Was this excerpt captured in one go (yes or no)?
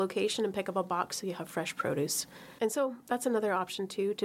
yes